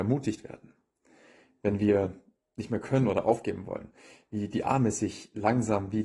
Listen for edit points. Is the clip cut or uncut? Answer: uncut